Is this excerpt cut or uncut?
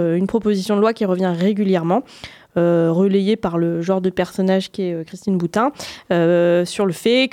uncut